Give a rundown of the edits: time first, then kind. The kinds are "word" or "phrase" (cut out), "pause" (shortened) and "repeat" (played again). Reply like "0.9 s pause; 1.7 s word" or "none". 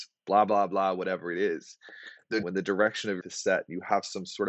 2.4 s word; 3.2 s word